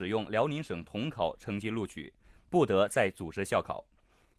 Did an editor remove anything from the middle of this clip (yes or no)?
no